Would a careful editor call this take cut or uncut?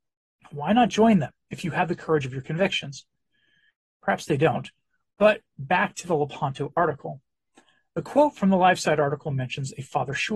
uncut